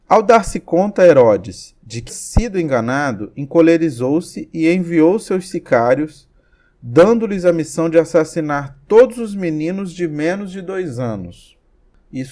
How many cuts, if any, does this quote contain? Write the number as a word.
one